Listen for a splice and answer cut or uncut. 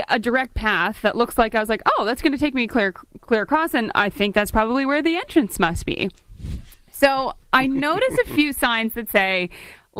uncut